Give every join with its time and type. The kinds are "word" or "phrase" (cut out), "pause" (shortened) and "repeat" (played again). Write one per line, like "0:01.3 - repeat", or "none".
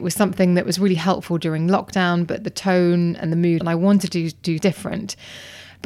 0:03.6 - phrase
0:04.6 - word

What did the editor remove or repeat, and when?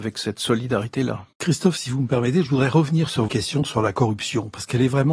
0:01.3 - pause
0:03.3 - word

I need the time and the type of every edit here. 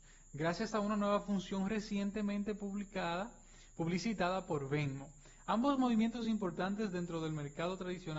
none

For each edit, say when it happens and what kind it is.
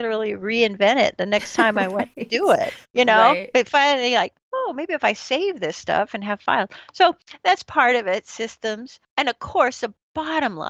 0:02.8 - pause
0:09.1 - pause

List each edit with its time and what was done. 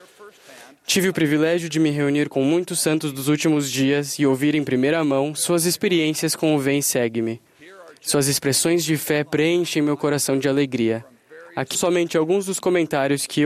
0:11.7 - word

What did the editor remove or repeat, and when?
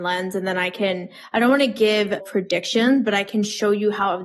0:02.2 - word

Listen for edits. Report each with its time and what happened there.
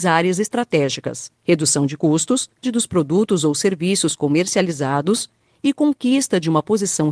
0:01.4 - pause
0:02.6 - word

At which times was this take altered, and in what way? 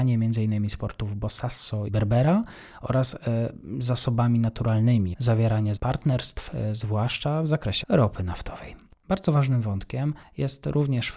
0:01.9 - word
0:05.1 - phrase
0:05.8 - word
0:07.8 - word

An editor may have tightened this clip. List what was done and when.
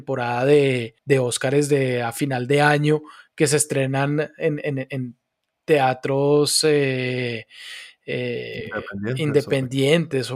0:01.0 - pause

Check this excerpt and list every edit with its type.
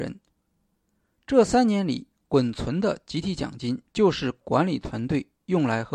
0:03.9 - pause

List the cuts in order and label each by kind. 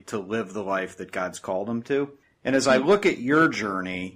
0:02.2 - pause

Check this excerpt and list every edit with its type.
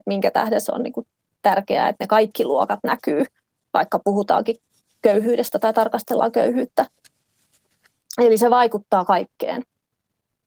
none

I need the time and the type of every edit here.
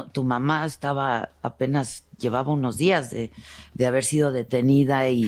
none

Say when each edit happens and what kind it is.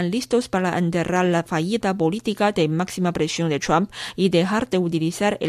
none

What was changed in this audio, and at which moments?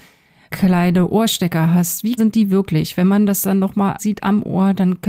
0:02.2 - word
0:04.0 - word

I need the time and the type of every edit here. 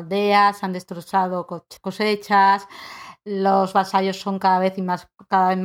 0:01.8 - pause

